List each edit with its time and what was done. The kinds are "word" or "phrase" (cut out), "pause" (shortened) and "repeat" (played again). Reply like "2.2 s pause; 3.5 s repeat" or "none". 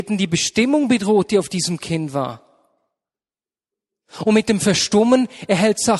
none